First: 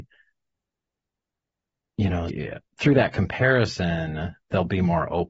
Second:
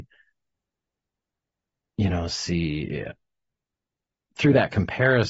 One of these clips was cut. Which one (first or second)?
first